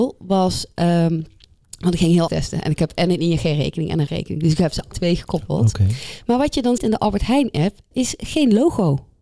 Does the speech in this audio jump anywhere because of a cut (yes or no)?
yes